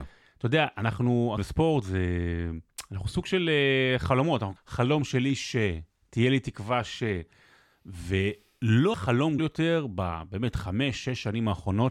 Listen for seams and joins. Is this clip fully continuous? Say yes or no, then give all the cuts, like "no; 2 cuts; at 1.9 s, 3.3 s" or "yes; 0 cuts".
no; 4 cuts; at 1.4 s, 4.6 s, 8.9 s, 9.4 s